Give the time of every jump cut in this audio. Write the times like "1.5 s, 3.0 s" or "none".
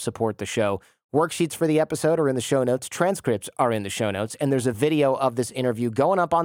none